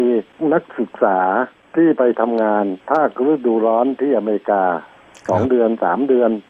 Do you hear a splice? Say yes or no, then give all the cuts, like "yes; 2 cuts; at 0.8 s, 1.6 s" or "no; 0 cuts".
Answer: yes; 1 cut; at 2.8 s